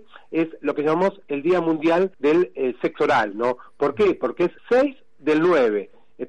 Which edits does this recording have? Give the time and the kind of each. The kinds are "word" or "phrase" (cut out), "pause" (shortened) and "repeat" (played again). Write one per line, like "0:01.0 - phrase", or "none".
0:02.1 - pause
0:04.6 - pause